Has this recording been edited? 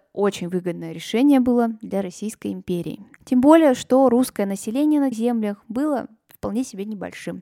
yes; 2 cuts; at 3.1 s, 5.1 s

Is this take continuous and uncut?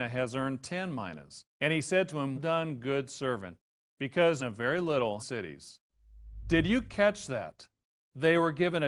no; 4 cuts; at 1.5 s, 2.4 s, 4.4 s, 5.2 s

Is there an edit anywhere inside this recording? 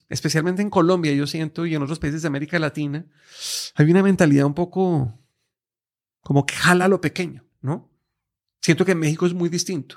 no; 0 cuts

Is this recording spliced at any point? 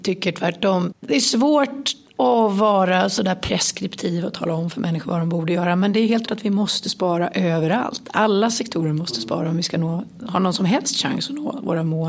yes; 2 cuts; at 1.0 s, 6.3 s

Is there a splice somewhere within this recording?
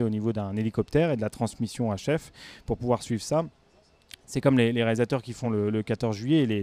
no; 0 cuts

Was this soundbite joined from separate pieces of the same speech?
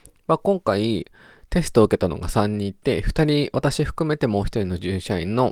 no; 0 cuts

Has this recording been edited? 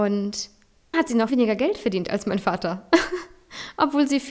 yes; 2 cuts; at 0.9 s, 1.3 s

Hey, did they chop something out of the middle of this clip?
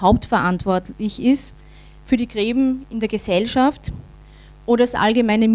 no; 0 cuts

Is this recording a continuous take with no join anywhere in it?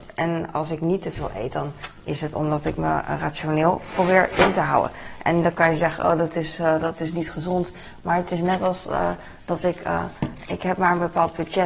yes; 0 cuts

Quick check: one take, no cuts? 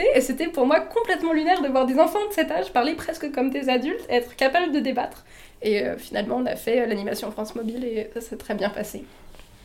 yes; 0 cuts

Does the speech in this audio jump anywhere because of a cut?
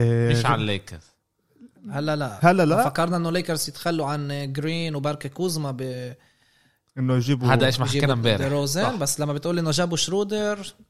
no; 0 cuts

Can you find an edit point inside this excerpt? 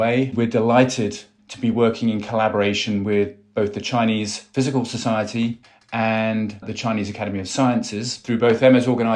no; 0 cuts

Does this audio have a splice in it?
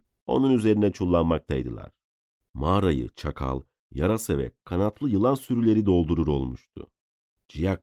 no; 0 cuts

